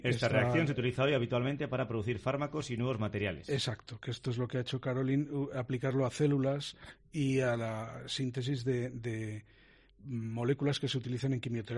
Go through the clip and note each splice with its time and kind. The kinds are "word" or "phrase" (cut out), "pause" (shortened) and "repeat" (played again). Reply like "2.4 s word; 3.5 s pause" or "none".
none